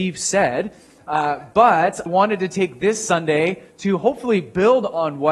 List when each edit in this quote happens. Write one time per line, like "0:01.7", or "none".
0:02.1